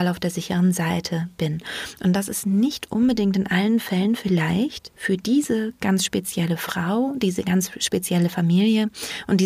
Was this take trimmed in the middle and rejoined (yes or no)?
no